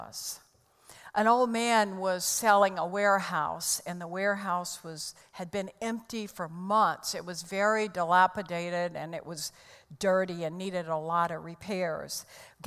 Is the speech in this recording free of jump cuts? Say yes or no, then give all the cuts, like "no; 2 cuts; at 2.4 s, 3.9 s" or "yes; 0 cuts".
yes; 0 cuts